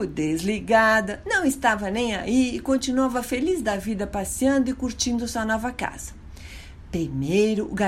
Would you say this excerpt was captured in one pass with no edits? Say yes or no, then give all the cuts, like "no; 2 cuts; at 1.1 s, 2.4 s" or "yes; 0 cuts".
yes; 0 cuts